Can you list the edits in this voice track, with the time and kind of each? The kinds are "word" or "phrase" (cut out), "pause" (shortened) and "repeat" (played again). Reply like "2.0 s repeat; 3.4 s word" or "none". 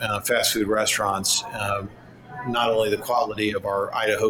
none